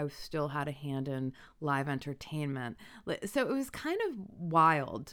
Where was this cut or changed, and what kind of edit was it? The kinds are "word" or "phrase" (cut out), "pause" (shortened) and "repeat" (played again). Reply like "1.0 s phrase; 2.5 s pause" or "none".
none